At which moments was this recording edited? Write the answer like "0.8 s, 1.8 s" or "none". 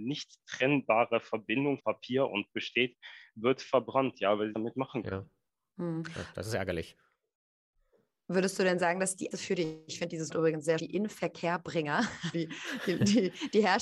1.8 s, 2.5 s, 4.5 s, 9.3 s, 10.3 s, 10.8 s, 12.3 s